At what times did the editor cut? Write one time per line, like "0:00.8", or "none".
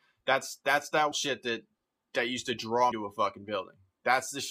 0:01.1
0:02.9